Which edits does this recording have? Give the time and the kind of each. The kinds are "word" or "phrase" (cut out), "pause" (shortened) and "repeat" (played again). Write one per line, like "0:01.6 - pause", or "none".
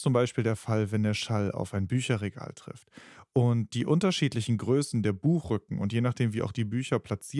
none